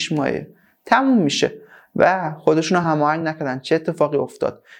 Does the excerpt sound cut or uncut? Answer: uncut